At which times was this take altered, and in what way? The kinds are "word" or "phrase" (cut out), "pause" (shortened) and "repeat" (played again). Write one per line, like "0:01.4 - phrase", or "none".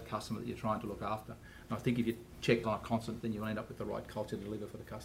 0:02.6 - word
0:03.2 - word